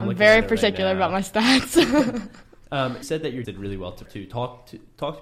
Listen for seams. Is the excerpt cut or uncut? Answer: cut